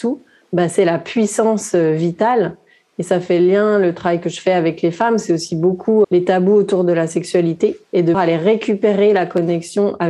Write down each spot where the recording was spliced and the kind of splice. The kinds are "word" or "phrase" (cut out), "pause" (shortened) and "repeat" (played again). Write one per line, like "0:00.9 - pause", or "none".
0:06.0 - word
0:07.8 - pause
0:08.1 - word